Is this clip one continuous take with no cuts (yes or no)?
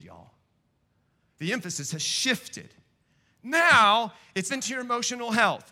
no